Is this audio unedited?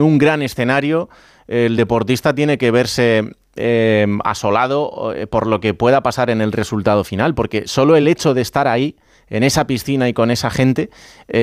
yes; 0 cuts

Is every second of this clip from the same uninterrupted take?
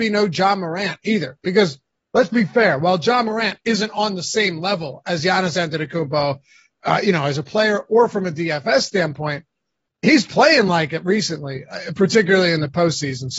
yes; 0 cuts

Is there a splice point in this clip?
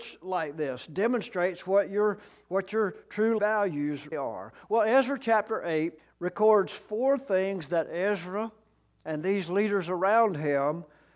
yes; 3 cuts; at 3.4 s, 4.1 s, 6.0 s

